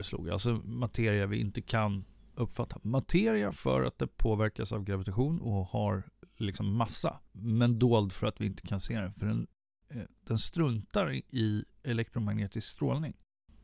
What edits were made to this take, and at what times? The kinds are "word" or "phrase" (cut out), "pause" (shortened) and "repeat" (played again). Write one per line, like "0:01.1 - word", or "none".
none